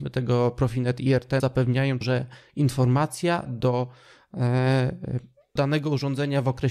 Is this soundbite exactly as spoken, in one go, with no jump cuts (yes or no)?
no